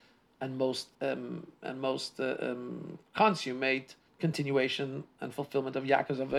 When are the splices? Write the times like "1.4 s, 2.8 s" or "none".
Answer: 0.9 s, 4.1 s